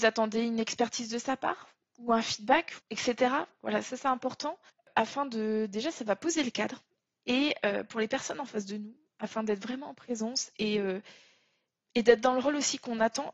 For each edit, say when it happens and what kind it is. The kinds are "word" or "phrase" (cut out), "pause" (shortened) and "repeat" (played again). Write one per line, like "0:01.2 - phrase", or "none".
0:02.8 - pause
0:04.7 - pause